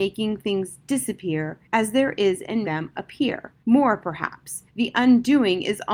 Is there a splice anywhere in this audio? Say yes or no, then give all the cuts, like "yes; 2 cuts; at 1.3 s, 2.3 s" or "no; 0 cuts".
yes; 4 cuts; at 1.6 s, 2.6 s, 3.6 s, 4.7 s